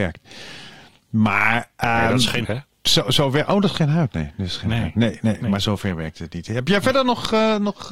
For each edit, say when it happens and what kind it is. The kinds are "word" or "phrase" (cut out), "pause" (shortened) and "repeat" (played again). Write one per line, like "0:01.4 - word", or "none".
0:02.4 - word